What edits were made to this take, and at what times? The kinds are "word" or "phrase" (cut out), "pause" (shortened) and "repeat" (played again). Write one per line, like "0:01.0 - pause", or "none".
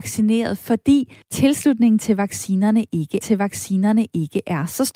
0:01.2 - pause
0:03.2 - repeat